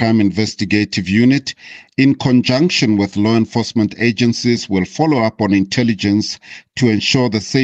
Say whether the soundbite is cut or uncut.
uncut